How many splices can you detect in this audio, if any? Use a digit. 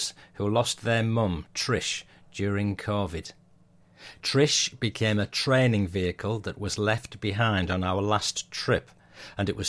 0